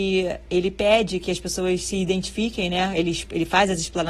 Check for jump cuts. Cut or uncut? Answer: uncut